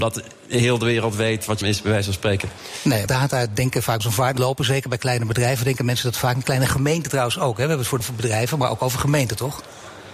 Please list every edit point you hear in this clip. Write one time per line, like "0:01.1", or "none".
0:01.6
0:03.1
0:04.0
0:04.4
0:08.0